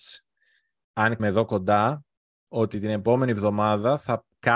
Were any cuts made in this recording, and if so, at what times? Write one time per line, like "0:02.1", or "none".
0:01.2
0:02.5

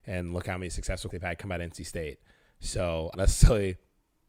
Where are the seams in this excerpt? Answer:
0:01.1
0:03.1

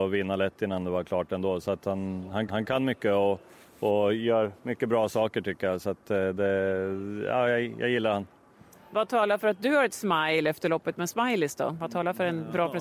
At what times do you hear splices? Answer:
0:02.5

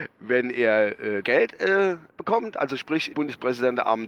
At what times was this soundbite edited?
0:01.2
0:02.1
0:03.1

